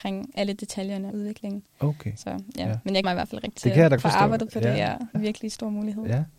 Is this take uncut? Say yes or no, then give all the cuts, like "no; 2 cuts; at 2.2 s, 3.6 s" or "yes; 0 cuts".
no; 5 cuts; at 1.1 s, 3.0 s, 3.6 s, 4.0 s, 5.1 s